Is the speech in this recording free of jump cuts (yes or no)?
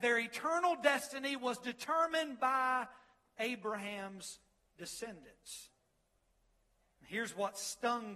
yes